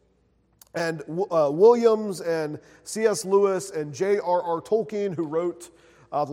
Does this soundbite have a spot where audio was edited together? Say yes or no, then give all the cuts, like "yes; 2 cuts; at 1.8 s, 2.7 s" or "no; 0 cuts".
no; 0 cuts